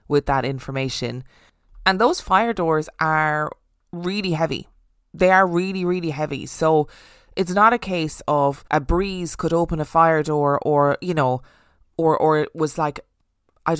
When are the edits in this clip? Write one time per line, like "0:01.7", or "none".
0:08.7